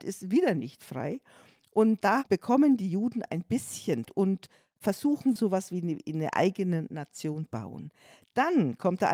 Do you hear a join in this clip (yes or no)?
yes